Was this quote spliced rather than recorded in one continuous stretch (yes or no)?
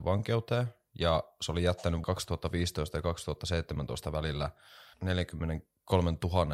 yes